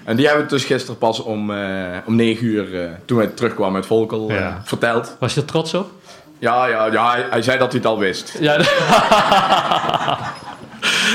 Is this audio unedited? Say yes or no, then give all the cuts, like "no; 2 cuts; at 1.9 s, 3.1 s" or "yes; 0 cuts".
yes; 0 cuts